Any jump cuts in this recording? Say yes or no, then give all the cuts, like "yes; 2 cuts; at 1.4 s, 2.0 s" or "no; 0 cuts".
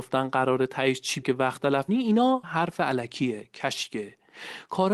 yes; 3 cuts; at 1.2 s, 1.9 s, 2.4 s